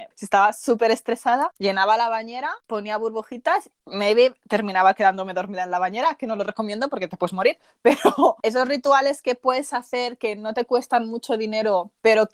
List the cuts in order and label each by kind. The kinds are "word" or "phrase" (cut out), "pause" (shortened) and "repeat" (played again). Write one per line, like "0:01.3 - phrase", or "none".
none